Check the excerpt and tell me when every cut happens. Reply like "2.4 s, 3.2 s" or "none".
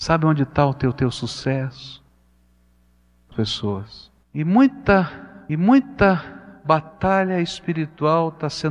0.9 s, 3.3 s, 5.5 s